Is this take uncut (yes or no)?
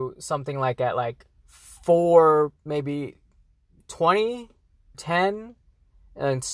no